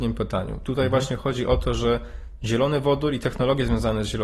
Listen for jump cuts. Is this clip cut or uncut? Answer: uncut